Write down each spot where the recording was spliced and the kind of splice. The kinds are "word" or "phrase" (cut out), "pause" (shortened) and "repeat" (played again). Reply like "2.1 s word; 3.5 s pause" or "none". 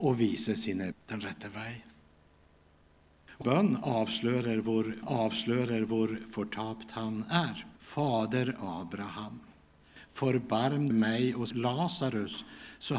0.9 s word; 3.4 s word; 5.0 s repeat; 7.8 s pause; 10.9 s phrase; 11.5 s word